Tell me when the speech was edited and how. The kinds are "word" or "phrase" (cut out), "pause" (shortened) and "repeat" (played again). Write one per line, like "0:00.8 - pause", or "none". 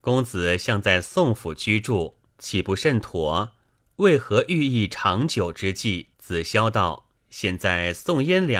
0:02.3 - pause
0:06.1 - pause
0:07.2 - pause